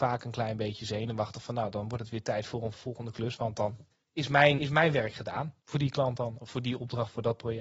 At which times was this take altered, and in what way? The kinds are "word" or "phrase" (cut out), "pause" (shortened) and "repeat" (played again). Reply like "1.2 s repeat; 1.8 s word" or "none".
2.7 s word; 3.9 s pause; 4.6 s word; 5.6 s pause; 6.5 s word

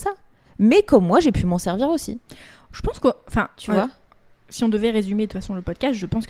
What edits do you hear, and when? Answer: none

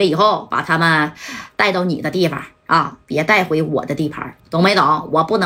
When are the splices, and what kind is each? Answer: 4.4 s pause

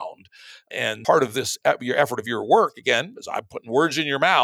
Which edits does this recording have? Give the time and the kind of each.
1.0 s word

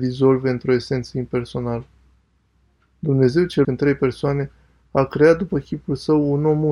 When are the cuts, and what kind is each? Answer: 3.6 s word

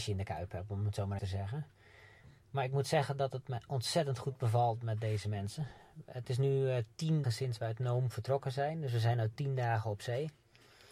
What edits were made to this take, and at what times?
1.2 s word; 7.2 s word

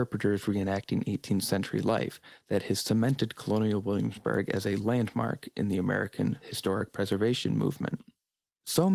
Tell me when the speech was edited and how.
none

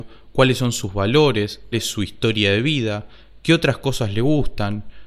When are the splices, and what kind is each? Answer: 1.7 s word

